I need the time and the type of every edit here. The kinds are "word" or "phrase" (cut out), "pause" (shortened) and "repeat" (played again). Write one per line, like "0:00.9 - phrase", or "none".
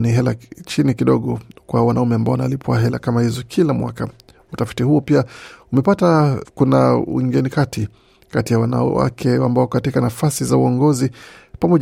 0:06.4 - word